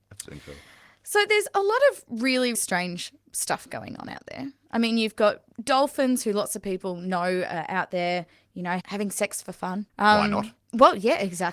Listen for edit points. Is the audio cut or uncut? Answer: cut